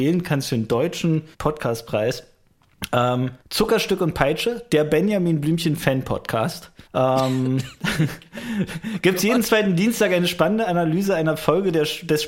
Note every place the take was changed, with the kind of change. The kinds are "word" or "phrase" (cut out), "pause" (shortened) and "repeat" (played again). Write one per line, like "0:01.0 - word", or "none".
0:01.3 - pause
0:03.4 - pause
0:06.9 - pause